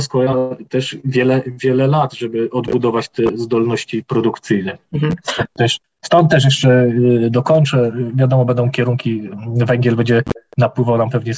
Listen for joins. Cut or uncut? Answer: cut